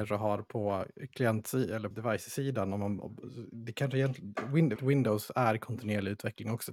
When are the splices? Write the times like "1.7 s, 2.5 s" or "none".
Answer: 1.9 s, 4.8 s